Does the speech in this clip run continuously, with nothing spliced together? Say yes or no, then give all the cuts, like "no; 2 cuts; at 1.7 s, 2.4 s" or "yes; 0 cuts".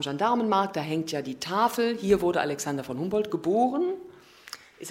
yes; 0 cuts